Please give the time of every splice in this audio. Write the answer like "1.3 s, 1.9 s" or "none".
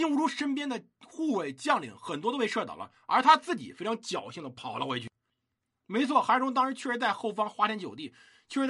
none